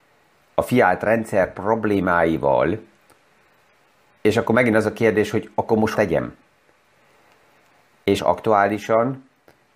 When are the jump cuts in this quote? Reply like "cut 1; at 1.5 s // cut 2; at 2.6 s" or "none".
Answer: cut 1; at 4.0 s // cut 2; at 5.9 s // cut 3; at 8.2 s